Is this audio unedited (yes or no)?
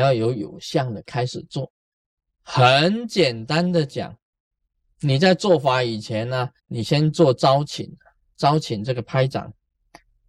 no